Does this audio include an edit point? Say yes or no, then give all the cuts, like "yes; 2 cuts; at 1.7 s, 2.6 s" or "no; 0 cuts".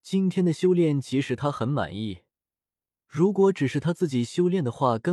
no; 0 cuts